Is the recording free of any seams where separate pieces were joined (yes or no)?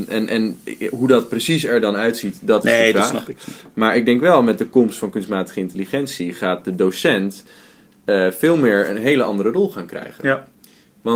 yes